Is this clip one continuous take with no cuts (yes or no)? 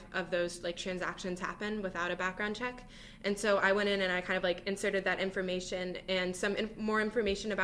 yes